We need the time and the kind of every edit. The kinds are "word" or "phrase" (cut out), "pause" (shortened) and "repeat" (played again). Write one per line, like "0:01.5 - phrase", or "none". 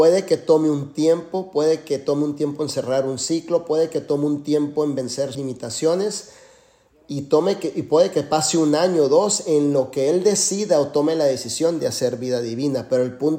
0:05.3 - word